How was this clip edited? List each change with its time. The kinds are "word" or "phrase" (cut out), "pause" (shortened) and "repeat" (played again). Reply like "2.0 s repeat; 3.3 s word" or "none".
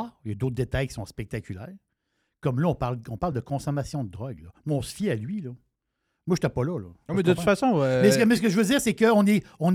none